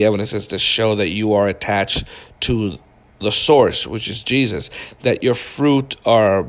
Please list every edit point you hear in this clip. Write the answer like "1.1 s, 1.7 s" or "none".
none